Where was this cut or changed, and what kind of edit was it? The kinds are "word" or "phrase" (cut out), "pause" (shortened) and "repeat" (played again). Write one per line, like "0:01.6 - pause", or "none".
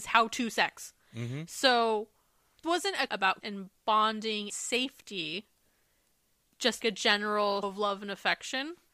0:02.6 - word
0:03.1 - word
0:03.4 - word
0:04.5 - word
0:06.8 - word
0:07.6 - word